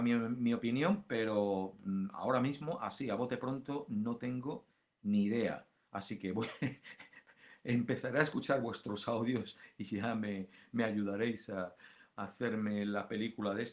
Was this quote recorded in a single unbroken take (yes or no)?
yes